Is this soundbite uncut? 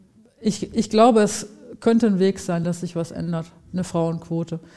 yes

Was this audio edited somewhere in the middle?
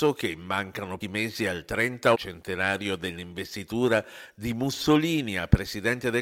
yes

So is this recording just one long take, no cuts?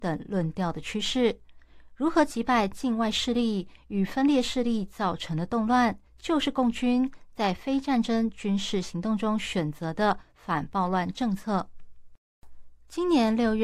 no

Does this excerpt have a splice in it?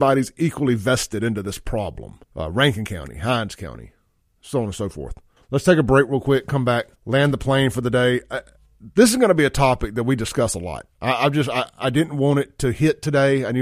yes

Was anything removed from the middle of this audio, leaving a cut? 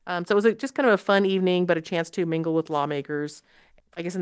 no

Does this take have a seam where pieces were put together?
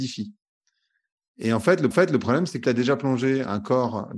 yes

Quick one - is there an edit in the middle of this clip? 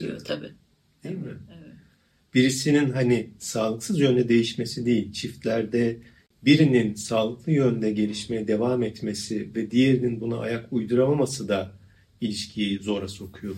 no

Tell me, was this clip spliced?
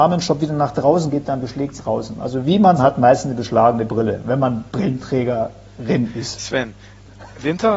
yes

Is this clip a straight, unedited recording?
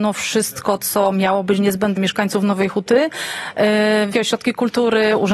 no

